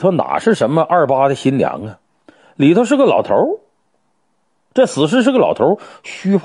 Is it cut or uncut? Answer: uncut